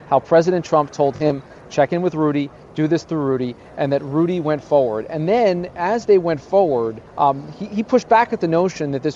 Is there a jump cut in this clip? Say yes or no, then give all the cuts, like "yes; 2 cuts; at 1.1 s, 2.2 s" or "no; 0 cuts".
yes; 1 cut; at 7.1 s